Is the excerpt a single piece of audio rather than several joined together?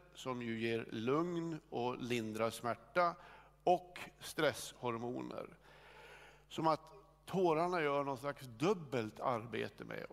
yes; 0 cuts

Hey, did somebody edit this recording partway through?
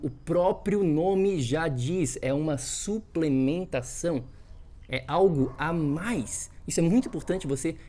no; 0 cuts

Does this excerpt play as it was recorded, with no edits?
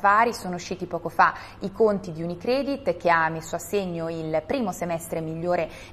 yes; 0 cuts

